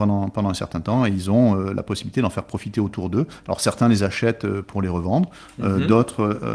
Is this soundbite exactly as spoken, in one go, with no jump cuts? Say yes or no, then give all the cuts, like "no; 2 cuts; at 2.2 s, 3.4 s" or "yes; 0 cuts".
yes; 0 cuts